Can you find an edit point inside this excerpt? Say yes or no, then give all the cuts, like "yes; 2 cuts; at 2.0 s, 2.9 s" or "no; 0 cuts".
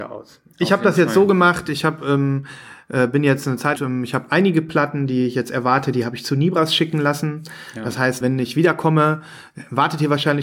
yes; 2 cuts; at 3.8 s, 8.2 s